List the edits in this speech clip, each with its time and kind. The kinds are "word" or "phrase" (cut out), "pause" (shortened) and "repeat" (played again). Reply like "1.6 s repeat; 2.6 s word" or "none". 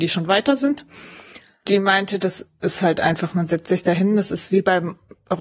none